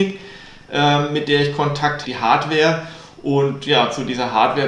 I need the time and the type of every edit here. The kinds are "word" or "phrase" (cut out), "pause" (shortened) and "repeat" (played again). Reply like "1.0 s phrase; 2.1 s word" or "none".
2.0 s phrase